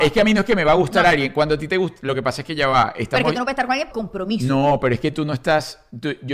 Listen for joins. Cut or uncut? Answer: cut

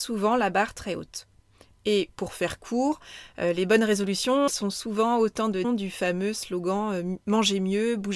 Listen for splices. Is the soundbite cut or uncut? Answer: cut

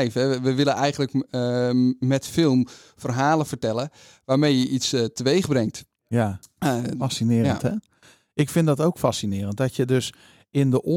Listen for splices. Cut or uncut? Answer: uncut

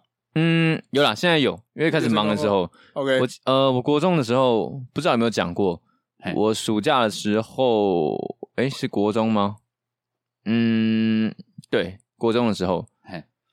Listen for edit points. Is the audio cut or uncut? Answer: uncut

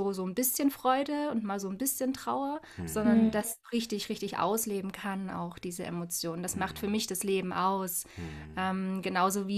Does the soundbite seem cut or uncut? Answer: uncut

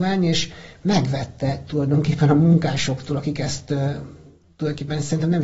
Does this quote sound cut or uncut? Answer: uncut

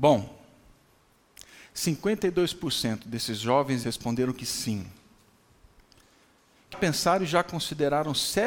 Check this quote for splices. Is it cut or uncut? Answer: cut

